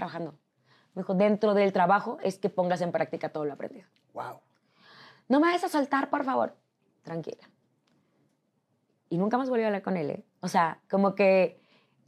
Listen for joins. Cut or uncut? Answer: uncut